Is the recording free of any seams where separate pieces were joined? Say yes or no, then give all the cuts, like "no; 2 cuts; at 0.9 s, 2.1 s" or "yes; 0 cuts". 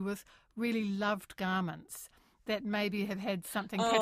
yes; 0 cuts